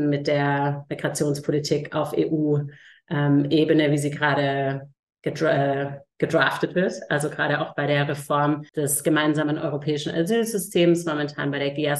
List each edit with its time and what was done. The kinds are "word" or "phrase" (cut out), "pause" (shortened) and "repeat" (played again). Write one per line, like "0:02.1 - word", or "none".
0:05.0 - pause
0:08.7 - pause